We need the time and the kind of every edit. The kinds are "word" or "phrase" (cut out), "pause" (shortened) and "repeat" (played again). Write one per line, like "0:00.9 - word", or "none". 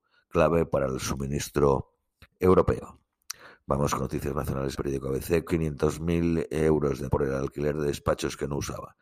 0:02.2 - pause
0:04.0 - word
0:04.7 - word
0:05.5 - phrase
0:07.1 - word